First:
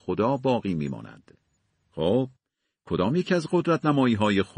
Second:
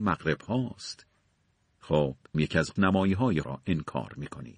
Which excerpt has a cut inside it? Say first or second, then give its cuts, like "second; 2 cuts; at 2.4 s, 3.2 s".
second; 3 cuts; at 2.3 s, 2.8 s, 3.4 s